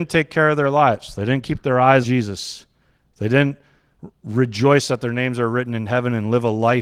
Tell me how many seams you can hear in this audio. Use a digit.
1